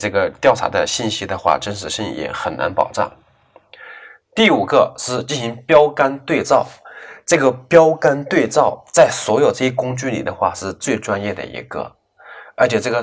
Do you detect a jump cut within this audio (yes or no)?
no